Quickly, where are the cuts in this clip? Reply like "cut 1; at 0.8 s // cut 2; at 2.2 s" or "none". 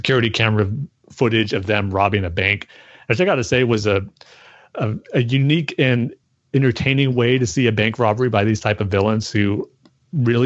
none